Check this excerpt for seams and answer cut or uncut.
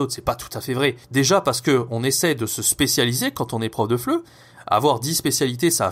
cut